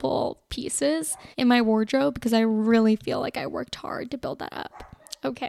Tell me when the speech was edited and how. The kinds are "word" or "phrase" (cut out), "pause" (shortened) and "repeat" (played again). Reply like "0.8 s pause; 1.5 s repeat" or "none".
1.3 s pause